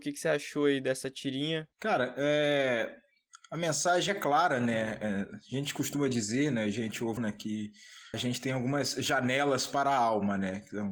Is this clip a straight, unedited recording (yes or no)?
no